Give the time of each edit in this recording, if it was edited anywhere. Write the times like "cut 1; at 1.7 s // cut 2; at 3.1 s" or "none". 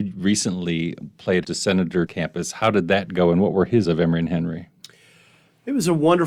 cut 1; at 1.4 s // cut 2; at 2.1 s // cut 3; at 3.8 s